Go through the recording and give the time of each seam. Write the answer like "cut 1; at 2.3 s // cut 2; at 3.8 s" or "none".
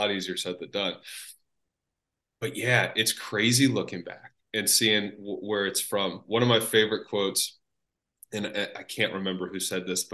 none